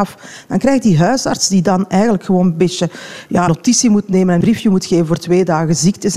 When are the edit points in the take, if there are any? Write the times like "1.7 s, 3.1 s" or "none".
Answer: 3.5 s, 4.4 s

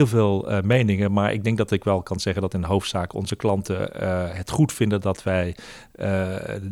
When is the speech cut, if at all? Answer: none

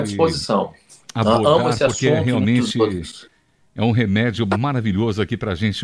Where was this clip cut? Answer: none

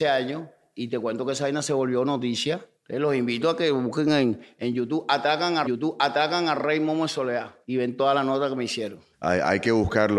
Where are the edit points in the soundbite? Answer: 2.7 s, 5.6 s, 7.6 s, 9.1 s

